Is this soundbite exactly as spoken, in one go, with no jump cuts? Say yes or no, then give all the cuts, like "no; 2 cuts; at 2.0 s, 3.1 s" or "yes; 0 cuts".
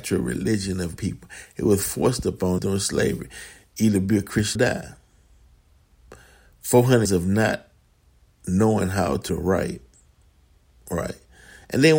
no; 5 cuts; at 1.0 s, 2.6 s, 4.6 s, 7.1 s, 9.3 s